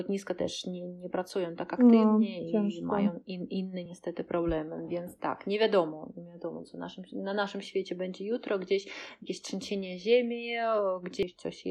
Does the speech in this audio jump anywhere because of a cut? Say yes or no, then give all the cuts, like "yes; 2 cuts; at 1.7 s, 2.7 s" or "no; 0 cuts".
no; 0 cuts